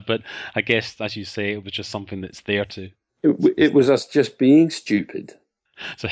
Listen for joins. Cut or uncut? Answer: uncut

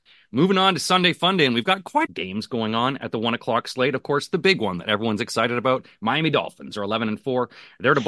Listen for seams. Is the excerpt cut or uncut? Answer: cut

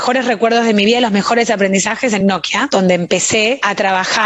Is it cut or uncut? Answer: uncut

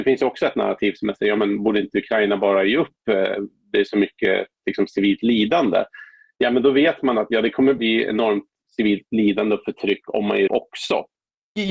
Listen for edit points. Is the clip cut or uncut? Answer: cut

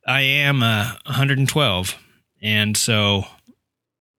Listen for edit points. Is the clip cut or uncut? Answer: uncut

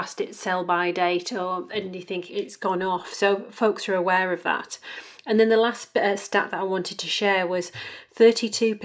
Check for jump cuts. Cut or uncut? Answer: cut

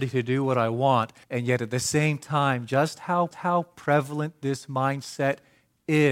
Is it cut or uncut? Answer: cut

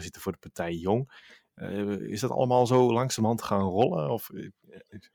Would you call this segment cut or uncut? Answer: uncut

